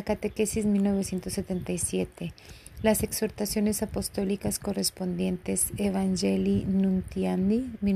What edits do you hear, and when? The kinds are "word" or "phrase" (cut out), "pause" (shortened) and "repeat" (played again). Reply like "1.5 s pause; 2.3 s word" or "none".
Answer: none